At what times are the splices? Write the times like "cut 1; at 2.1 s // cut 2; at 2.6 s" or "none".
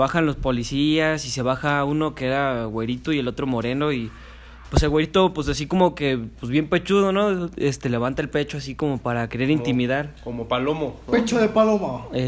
none